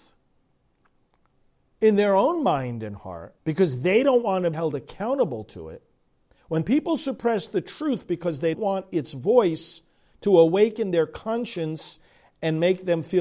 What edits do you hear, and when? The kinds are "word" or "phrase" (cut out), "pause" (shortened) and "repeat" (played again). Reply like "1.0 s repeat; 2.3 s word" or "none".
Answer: 3.4 s pause; 4.5 s word; 8.5 s word